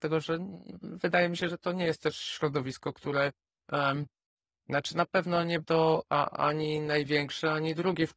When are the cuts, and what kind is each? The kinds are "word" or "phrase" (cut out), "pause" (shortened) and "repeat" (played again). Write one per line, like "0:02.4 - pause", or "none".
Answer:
0:05.6 - word